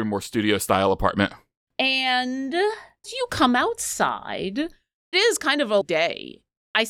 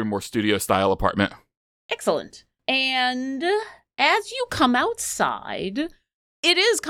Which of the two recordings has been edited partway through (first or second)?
first